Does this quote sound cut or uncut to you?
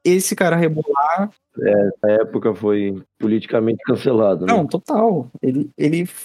cut